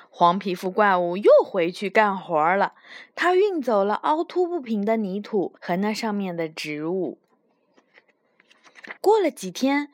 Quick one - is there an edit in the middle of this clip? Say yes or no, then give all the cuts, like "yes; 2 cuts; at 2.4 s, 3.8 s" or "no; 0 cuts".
yes; 2 cuts; at 5.6 s, 9.0 s